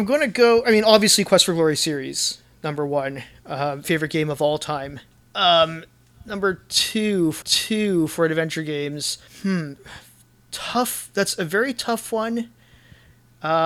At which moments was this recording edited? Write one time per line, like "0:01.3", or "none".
0:03.8
0:05.1
0:07.4
0:09.3